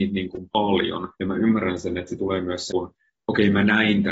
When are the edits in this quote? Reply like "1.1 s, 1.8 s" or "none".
1.1 s, 2.2 s, 2.7 s